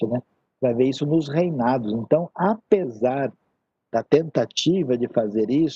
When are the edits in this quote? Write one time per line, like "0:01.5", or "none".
none